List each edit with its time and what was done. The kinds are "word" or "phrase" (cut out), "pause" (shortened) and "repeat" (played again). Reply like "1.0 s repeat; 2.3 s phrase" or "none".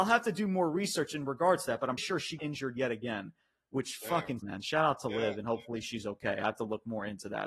2.0 s word; 2.4 s word; 4.4 s word